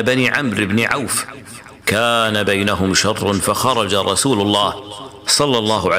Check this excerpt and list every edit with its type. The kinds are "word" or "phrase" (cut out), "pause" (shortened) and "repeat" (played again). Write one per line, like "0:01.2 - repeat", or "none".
none